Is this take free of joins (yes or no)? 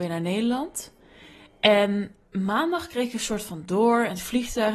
yes